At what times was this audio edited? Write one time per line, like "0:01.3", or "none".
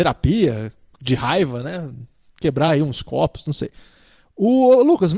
none